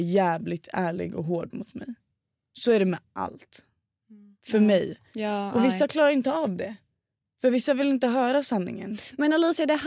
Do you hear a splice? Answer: no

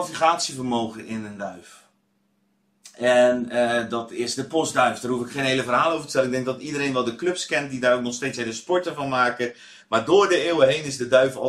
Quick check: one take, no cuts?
yes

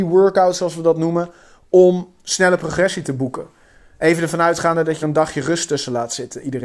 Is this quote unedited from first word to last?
no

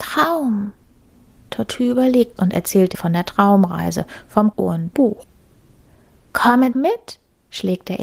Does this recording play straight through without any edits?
no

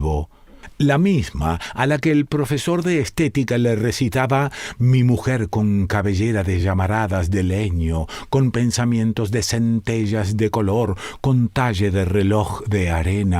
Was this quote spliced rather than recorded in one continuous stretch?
no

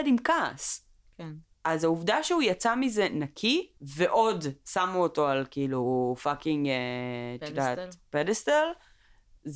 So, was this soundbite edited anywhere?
yes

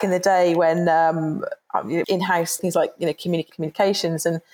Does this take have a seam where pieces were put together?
yes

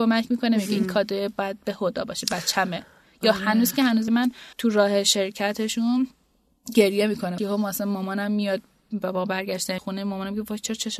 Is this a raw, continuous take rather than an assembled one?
no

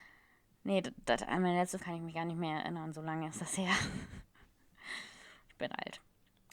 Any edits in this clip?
yes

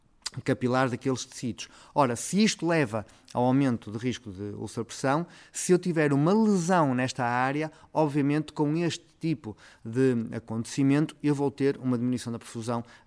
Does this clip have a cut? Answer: no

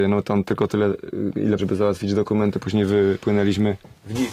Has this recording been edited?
yes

